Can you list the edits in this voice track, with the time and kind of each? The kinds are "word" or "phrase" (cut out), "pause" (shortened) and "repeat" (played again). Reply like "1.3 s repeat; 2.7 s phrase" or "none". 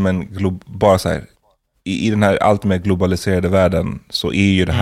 none